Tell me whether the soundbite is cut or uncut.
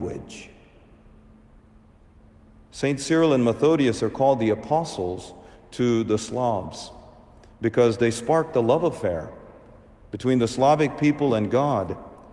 uncut